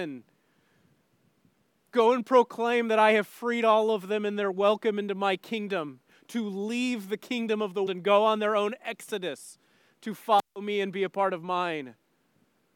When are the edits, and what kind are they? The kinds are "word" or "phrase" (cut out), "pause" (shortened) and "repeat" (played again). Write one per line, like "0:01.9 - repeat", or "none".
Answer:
0:07.9 - word

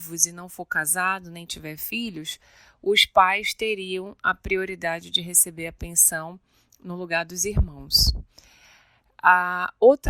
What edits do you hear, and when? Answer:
none

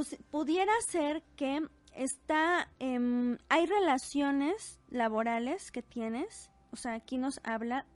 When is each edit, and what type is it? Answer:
0:02.7 - pause

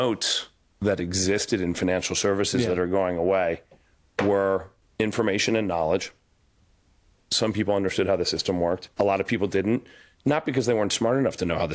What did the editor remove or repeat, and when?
0:04.8 - word
0:08.9 - pause

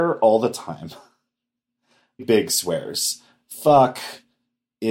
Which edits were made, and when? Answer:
0:02.2 - word

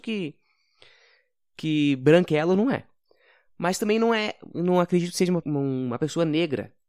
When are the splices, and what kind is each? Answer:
0:05.4 - word

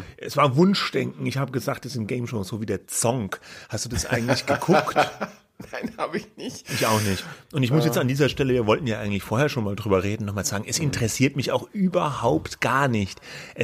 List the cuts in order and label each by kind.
none

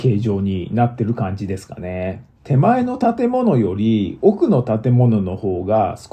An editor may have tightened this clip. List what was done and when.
0:02.3 - pause

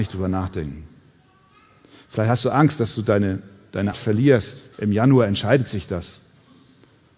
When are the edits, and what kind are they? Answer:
0:03.9 - word
0:04.7 - pause

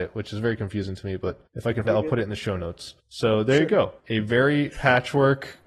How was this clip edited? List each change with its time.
0:01.5 - pause
0:01.8 - word
0:03.0 - pause
0:04.0 - pause
0:04.7 - word

